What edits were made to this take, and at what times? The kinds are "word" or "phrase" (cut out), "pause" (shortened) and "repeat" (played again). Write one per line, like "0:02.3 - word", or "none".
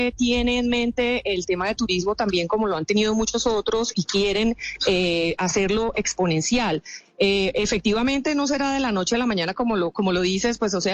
0:03.9 - word